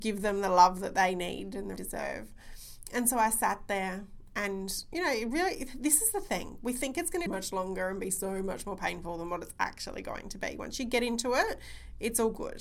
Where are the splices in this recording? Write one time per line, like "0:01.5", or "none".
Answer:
0:01.8
0:07.3